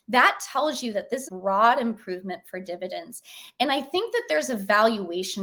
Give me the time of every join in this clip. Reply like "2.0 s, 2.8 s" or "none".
1.3 s